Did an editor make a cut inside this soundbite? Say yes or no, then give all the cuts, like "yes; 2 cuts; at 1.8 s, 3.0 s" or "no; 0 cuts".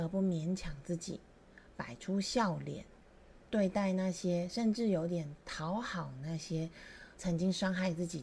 yes; 2 cuts; at 3.5 s, 7.1 s